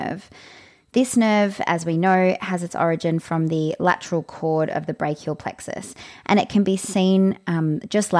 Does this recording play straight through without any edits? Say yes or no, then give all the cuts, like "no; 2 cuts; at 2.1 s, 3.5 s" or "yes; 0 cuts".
yes; 0 cuts